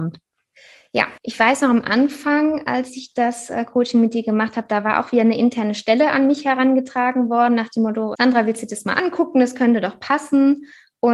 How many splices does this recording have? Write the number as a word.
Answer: one